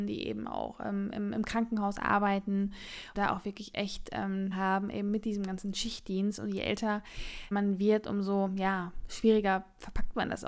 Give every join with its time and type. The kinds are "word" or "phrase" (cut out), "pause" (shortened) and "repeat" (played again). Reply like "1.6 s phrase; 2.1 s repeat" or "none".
3.1 s word; 4.5 s phrase; 7.5 s word